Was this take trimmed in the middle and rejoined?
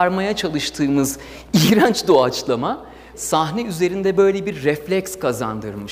yes; 1 cut; at 3.1 s

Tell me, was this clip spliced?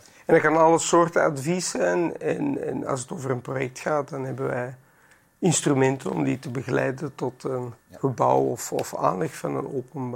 yes; 1 cut; at 7.8 s

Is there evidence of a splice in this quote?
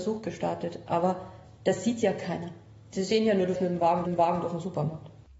yes; 3 cuts; at 2.8 s, 3.6 s, 4.1 s

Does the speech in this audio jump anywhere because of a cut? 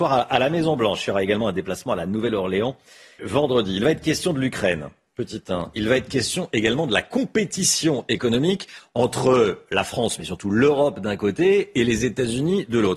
yes; 1 cut; at 3.2 s

